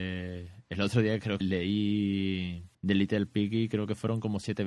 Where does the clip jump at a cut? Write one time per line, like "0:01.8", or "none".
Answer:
0:01.4
0:02.7